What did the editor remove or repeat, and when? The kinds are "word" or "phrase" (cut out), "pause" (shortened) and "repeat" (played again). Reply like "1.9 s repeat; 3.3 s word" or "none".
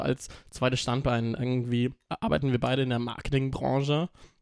none